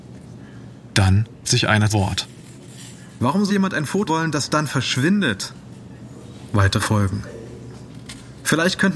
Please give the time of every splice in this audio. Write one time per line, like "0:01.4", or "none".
0:01.4
0:01.9
0:03.5
0:04.1
0:06.8